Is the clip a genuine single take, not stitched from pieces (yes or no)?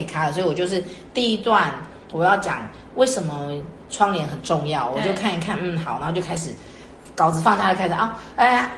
yes